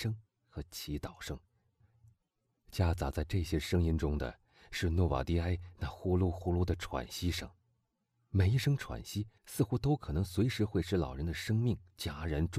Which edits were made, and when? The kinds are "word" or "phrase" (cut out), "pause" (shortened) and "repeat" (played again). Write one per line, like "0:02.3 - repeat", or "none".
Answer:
0:09.4 - pause